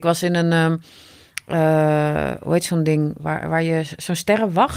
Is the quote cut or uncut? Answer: uncut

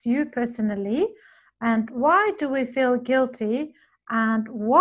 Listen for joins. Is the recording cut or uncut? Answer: uncut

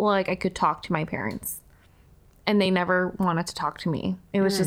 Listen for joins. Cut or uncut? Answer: uncut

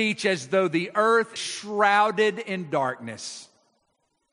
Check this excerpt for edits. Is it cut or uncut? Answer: cut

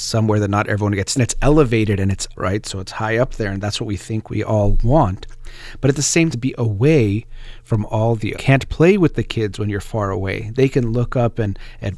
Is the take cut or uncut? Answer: cut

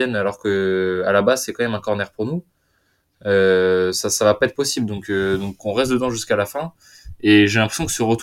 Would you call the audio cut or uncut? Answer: uncut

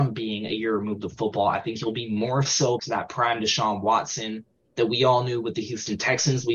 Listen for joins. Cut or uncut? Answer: cut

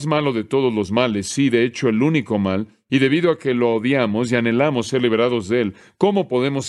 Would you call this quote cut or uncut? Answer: uncut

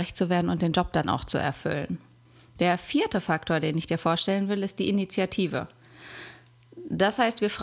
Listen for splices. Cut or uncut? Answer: cut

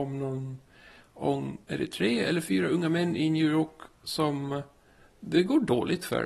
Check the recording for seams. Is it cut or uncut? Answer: cut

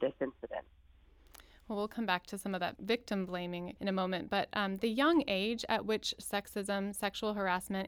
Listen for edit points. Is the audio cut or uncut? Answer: uncut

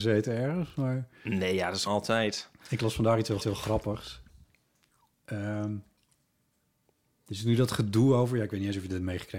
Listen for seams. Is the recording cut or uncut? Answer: cut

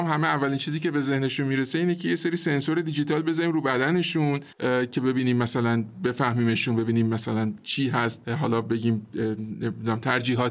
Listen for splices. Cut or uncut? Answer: cut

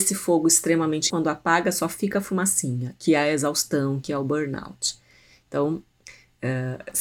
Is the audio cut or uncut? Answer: cut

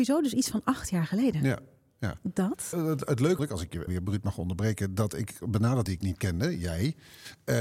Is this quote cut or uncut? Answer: cut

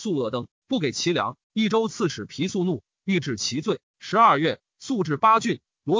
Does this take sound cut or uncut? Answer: cut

